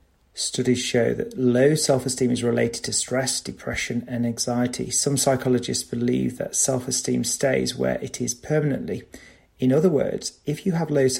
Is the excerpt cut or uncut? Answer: uncut